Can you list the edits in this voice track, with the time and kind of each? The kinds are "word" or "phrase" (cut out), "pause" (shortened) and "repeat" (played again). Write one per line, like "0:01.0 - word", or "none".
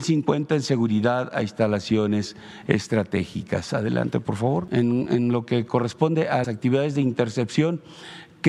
0:06.4 - word